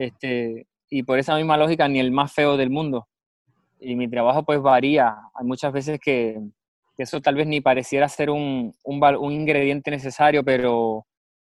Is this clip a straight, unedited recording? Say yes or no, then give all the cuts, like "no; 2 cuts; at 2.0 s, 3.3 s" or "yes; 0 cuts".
yes; 0 cuts